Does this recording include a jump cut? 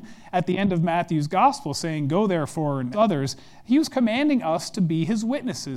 yes; 1 cut; at 2.9 s

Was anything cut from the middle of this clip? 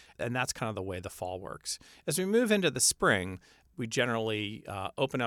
no; 0 cuts

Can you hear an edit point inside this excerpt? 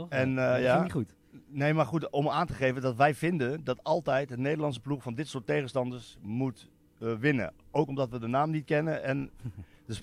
no; 0 cuts

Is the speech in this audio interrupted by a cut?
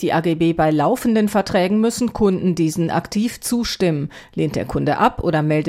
no; 0 cuts

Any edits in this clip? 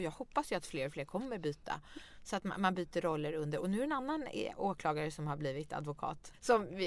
no; 0 cuts

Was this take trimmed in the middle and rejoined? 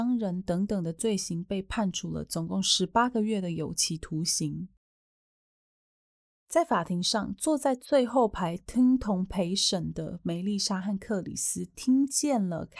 no; 0 cuts

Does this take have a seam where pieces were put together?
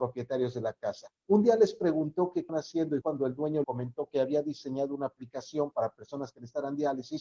yes; 4 cuts; at 1.2 s, 2.5 s, 3.0 s, 3.6 s

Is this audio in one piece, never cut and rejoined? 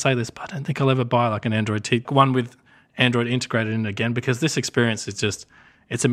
no; 1 cut; at 2.0 s

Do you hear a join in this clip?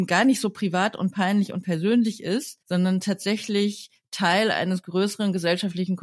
yes; 1 cut; at 2.6 s

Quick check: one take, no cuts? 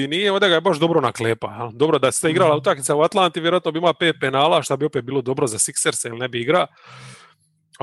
yes; 0 cuts

